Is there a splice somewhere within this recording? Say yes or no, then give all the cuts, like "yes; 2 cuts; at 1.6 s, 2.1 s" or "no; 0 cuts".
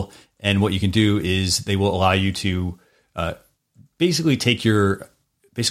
no; 0 cuts